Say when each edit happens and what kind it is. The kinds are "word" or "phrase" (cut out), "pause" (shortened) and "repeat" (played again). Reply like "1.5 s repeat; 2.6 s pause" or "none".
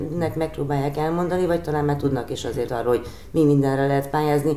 2.7 s word

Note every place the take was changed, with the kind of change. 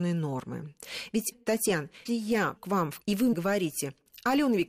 1.3 s word; 2.1 s word; 2.6 s word; 3.0 s word; 3.3 s word

